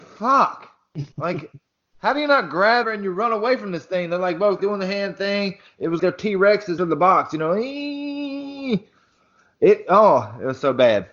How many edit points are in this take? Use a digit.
5